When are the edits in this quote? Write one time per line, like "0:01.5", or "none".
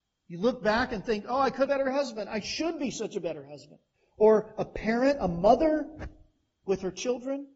0:01.7
0:03.9